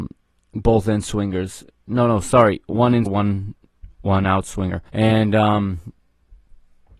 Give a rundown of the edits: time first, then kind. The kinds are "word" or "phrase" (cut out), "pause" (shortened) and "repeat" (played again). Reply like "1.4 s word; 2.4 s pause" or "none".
3.1 s word; 3.9 s pause; 4.9 s pause